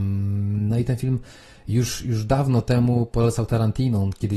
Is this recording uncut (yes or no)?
yes